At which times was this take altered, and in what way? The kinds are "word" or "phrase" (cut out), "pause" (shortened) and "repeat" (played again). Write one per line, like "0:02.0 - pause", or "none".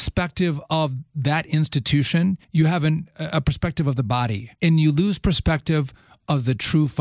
0:02.4 - pause
0:04.5 - pause